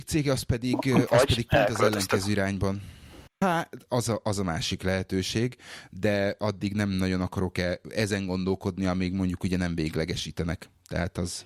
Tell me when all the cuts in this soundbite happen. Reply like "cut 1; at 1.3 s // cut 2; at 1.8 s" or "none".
cut 1; at 3.3 s